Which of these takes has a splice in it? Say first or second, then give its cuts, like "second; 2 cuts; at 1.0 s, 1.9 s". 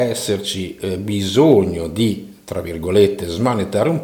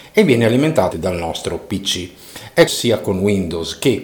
second; 2 cuts; at 0.9 s, 2.7 s